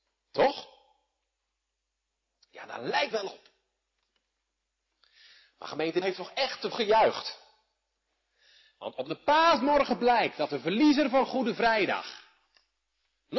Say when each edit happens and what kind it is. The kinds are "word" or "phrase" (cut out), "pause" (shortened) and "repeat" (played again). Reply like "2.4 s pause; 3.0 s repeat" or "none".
3.1 s word; 6.0 s word; 6.7 s word